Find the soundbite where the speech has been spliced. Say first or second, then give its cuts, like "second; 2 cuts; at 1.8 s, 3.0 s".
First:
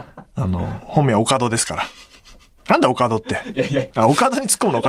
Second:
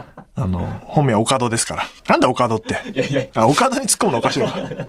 second; 1 cut; at 2.0 s